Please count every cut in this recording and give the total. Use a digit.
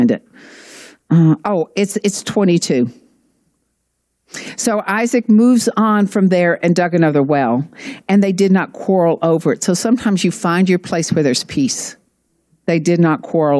0